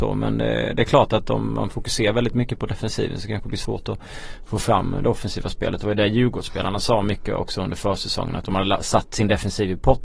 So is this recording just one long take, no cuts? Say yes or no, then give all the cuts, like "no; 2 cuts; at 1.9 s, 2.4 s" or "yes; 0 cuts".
yes; 0 cuts